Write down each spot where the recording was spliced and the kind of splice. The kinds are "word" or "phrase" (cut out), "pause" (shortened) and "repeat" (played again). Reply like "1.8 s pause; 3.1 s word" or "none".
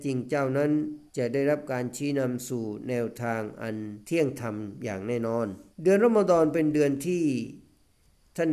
1.1 s pause; 4.0 s pause; 5.7 s pause